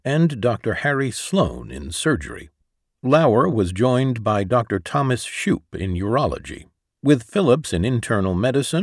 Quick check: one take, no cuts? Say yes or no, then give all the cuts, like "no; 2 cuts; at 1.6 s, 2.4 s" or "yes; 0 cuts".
yes; 0 cuts